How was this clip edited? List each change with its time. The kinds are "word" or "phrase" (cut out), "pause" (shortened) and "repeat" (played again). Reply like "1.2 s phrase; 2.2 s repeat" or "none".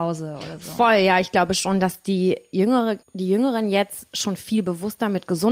3.0 s pause